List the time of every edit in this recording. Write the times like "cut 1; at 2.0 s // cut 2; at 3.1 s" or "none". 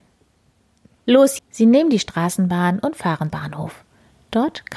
cut 1; at 1.4 s // cut 2; at 3.3 s

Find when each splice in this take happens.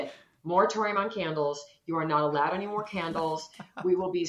none

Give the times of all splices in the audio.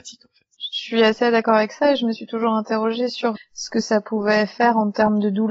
cut 1; at 3.4 s

